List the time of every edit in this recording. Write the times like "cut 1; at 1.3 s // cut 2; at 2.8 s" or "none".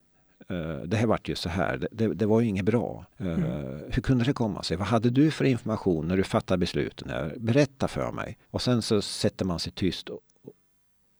cut 1; at 3.1 s // cut 2; at 8.4 s